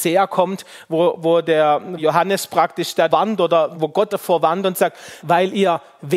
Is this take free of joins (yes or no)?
no